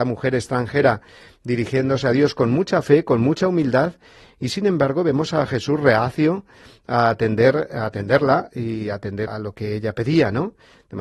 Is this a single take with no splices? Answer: no; 1 cut; at 9.3 s

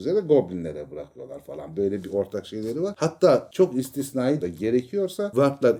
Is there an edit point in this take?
yes; 1 cut; at 4.4 s

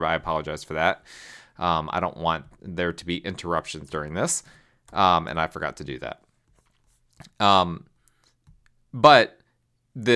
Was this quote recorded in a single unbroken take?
yes; 0 cuts

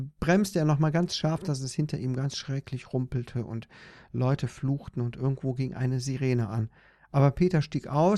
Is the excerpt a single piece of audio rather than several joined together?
yes; 0 cuts

